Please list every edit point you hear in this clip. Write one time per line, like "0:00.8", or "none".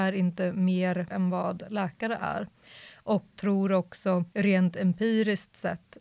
0:01.1
0:03.4
0:04.3